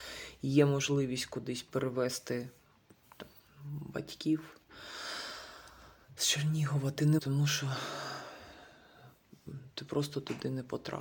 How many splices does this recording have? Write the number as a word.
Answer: two